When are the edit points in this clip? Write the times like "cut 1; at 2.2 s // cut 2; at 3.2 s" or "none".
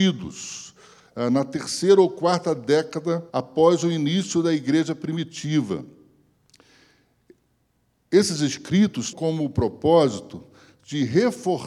cut 1; at 3.3 s // cut 2; at 9.1 s